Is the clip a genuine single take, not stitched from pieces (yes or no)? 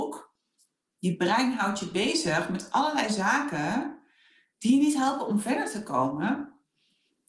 yes